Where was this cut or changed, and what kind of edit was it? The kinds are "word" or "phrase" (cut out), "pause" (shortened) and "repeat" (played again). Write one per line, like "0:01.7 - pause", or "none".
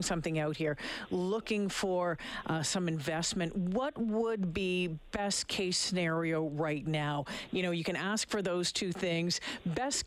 none